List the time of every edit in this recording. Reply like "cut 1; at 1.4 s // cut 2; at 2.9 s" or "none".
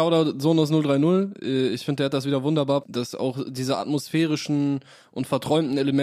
cut 1; at 2.8 s